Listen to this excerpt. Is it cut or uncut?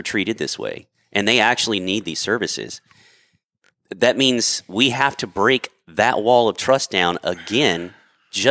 uncut